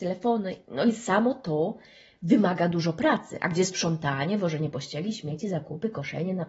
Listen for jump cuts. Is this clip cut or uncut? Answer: uncut